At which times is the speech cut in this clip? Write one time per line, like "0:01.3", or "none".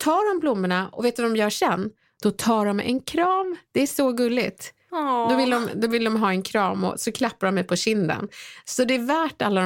none